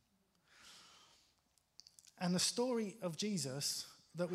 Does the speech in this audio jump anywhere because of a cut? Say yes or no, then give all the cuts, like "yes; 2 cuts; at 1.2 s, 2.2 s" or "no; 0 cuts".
no; 0 cuts